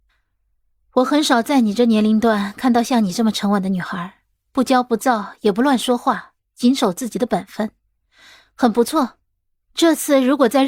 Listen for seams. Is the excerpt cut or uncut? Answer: uncut